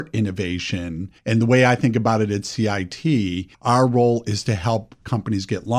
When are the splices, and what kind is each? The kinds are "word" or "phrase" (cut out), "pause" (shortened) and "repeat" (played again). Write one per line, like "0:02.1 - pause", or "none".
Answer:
0:01.2 - pause
0:03.5 - pause